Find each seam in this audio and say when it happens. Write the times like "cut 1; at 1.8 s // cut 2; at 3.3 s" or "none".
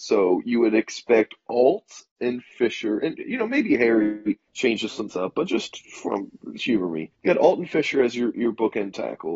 cut 1; at 4.5 s // cut 2; at 5.1 s // cut 3; at 6.6 s // cut 4; at 7.1 s